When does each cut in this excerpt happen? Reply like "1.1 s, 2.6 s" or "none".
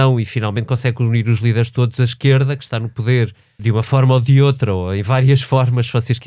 3.6 s